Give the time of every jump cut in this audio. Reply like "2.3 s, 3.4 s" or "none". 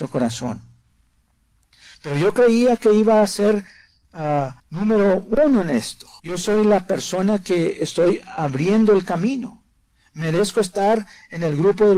4.6 s, 6.2 s, 9.0 s